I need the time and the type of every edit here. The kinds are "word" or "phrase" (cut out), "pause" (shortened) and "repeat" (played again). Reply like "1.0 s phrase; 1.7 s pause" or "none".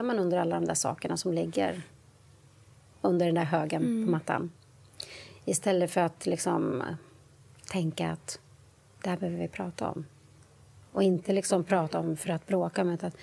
none